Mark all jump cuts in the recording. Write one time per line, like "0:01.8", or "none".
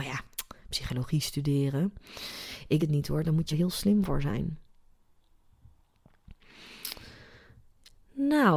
0:02.8
0:03.5